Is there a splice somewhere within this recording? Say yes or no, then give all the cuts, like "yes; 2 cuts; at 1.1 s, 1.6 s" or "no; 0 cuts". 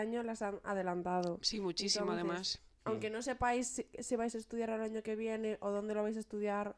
no; 0 cuts